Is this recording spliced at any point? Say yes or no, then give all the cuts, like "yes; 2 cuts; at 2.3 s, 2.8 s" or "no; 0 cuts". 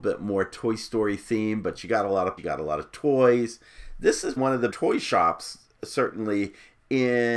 yes; 3 cuts; at 2.4 s, 4.4 s, 4.7 s